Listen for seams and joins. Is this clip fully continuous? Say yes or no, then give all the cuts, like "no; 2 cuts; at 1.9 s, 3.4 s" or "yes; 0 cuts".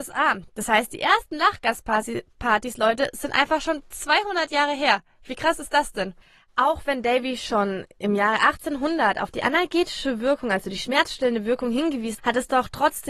no; 2 cuts; at 6.2 s, 12.2 s